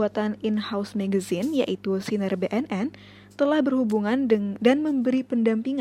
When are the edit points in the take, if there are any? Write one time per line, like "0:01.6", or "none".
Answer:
none

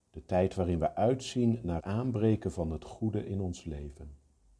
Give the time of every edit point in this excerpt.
0:01.8

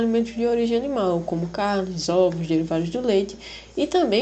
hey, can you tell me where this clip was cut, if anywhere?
none

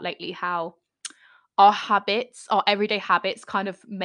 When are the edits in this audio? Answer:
none

